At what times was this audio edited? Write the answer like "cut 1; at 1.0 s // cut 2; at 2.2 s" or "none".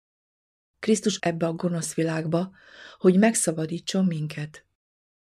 cut 1; at 1.2 s